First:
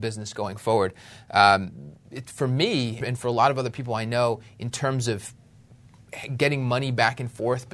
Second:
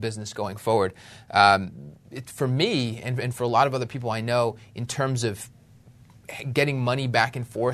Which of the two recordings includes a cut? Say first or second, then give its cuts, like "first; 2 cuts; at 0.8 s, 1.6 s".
first; 1 cut; at 3.0 s